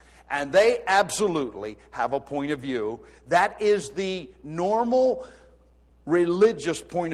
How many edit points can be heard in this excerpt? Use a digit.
0